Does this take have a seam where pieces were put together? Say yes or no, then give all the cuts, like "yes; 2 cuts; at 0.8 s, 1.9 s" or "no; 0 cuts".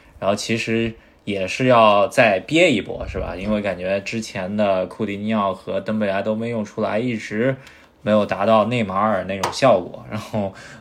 no; 0 cuts